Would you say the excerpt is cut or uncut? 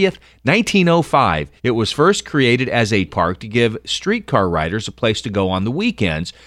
cut